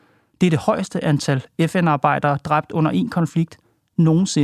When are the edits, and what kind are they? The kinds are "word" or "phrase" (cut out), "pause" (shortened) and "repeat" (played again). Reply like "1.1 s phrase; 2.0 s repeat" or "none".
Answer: none